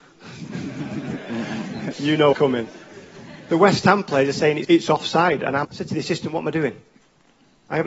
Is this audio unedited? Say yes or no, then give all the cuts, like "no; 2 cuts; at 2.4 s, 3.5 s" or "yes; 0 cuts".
no; 4 cuts; at 1.9 s, 2.3 s, 4.6 s, 5.6 s